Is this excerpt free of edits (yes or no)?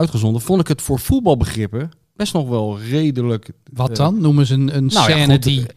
yes